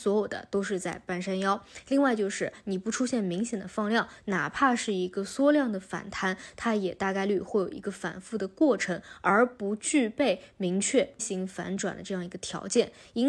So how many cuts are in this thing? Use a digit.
1